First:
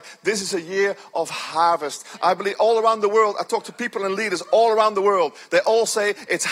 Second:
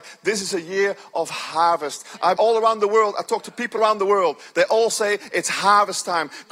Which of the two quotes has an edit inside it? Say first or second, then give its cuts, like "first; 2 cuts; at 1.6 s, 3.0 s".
second; 2 cuts; at 2.4 s, 3.8 s